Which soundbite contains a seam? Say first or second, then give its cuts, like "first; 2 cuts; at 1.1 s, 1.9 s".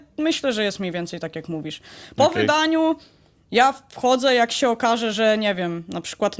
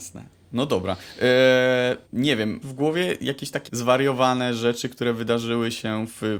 second; 3 cuts; at 2.1 s, 2.6 s, 3.7 s